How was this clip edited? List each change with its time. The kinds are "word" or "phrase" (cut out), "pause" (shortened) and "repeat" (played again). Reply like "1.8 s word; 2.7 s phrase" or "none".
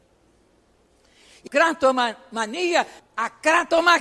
1.5 s word; 3.0 s word